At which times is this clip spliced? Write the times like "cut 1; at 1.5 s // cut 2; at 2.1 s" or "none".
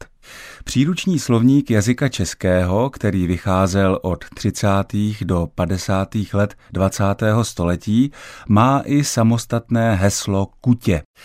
none